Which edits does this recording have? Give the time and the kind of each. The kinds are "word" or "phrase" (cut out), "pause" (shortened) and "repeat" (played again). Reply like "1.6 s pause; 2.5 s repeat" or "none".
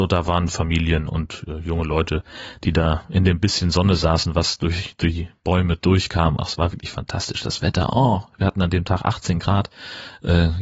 none